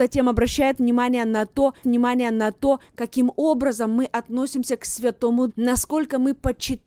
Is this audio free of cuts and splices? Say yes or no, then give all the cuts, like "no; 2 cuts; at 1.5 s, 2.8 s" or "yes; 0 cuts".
no; 2 cuts; at 1.8 s, 5.5 s